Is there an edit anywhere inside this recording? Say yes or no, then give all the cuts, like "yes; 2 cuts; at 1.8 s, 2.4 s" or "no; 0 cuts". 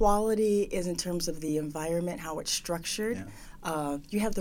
no; 0 cuts